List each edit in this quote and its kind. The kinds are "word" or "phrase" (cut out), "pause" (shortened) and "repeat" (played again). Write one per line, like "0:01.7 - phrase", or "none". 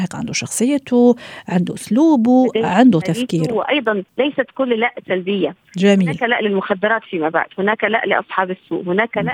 0:03.0 - phrase
0:04.1 - pause